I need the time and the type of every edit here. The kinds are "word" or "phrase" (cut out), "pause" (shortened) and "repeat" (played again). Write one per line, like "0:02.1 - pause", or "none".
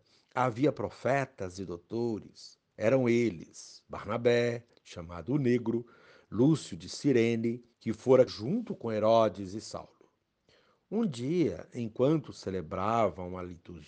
0:04.7 - word
0:07.7 - word
0:08.3 - word